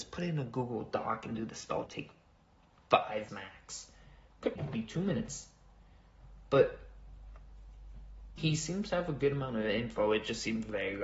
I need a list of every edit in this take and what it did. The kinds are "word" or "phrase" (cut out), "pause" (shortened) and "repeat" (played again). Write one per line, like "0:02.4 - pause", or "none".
0:01.9 - phrase
0:03.3 - word
0:04.6 - word
0:08.4 - word